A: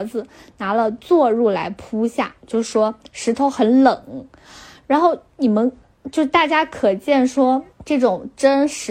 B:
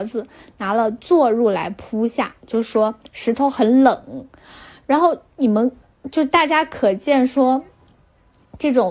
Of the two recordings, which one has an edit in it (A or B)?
A